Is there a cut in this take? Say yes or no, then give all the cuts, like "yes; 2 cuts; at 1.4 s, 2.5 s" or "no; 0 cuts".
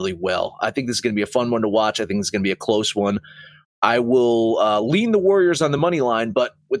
no; 0 cuts